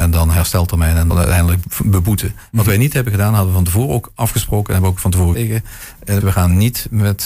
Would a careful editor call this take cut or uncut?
cut